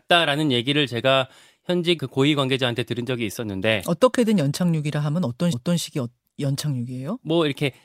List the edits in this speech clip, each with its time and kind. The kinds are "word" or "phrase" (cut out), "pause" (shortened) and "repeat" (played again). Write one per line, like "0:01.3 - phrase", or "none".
0:02.0 - word
0:05.5 - repeat